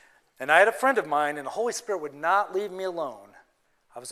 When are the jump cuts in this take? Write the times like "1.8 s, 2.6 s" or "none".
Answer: none